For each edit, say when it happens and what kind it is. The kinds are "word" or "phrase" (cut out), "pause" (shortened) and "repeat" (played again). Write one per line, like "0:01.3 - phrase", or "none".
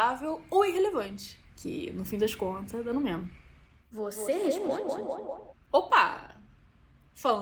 0:01.5 - pause